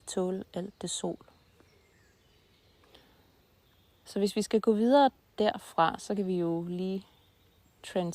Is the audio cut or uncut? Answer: uncut